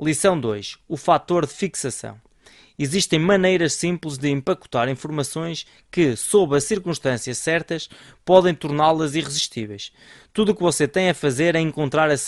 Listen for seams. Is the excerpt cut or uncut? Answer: uncut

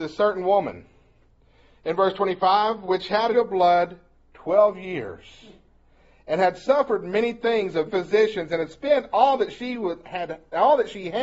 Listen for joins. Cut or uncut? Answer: cut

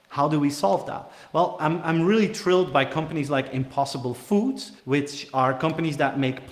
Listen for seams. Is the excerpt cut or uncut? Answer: cut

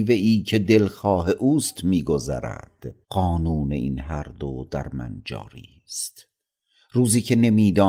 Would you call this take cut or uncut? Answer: cut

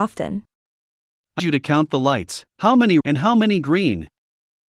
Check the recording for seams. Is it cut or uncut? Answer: cut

